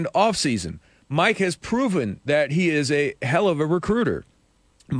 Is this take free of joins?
yes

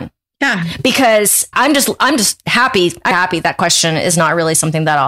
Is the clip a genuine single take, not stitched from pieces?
no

